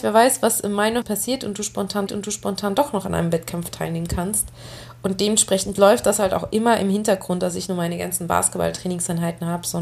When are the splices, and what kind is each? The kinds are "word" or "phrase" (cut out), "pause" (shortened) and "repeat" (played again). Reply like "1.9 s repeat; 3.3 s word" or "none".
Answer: 1.0 s word; 2.1 s repeat; 7.7 s word